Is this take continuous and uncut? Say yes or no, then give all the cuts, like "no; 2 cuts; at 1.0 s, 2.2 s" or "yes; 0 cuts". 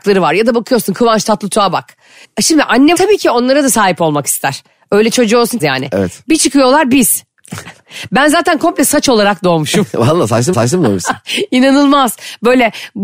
no; 3 cuts; at 2.9 s, 5.6 s, 10.5 s